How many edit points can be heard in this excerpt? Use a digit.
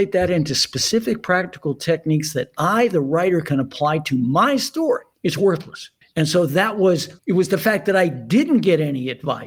3